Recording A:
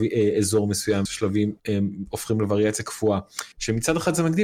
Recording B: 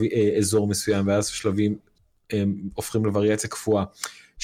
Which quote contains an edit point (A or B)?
A